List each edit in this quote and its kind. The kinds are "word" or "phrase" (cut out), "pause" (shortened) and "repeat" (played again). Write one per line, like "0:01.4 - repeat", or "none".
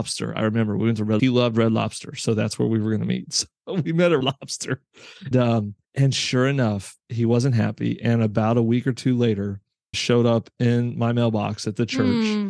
0:01.2 - phrase
0:04.2 - word
0:05.3 - word
0:05.8 - pause
0:07.0 - pause
0:09.9 - word